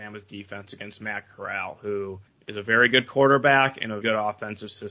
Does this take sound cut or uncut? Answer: cut